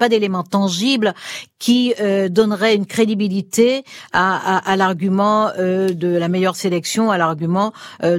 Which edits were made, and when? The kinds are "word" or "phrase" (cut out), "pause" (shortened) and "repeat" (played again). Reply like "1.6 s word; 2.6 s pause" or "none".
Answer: none